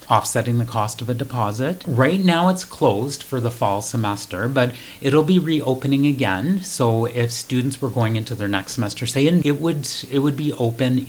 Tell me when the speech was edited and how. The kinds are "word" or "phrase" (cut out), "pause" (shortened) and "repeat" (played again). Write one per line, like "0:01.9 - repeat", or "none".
0:09.4 - word